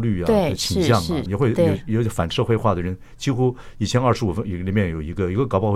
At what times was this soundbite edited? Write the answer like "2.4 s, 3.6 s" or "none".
1.3 s

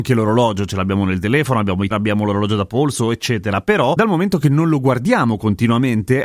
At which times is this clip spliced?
1.9 s

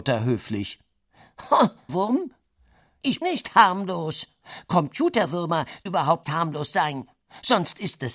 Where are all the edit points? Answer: 1.9 s, 3.2 s, 5.9 s, 6.2 s

